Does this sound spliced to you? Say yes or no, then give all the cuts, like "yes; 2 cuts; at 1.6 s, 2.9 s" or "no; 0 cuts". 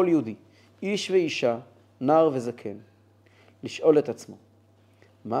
no; 0 cuts